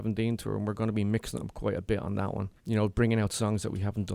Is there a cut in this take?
yes; 1 cut; at 2.6 s

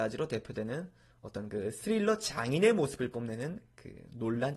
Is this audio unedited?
yes; 0 cuts

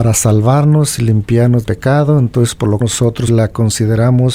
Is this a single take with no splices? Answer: no; 3 cuts; at 1.6 s, 2.8 s, 3.3 s

